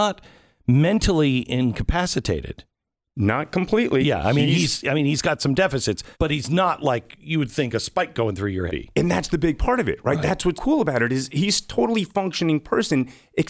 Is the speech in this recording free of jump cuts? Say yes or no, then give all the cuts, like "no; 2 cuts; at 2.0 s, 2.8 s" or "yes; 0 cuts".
no; 3 cuts; at 6.1 s, 8.7 s, 10.5 s